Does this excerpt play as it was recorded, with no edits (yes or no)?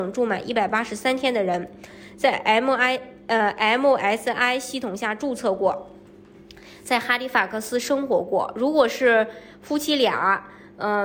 yes